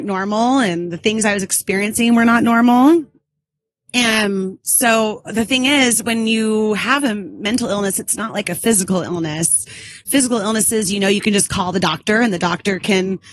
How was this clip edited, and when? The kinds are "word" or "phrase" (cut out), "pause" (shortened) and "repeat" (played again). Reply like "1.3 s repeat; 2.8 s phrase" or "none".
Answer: none